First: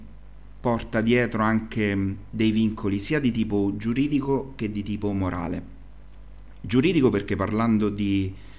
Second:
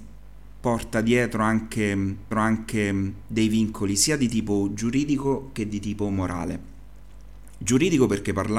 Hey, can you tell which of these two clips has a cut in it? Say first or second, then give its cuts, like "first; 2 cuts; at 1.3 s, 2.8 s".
second; 1 cut; at 2.3 s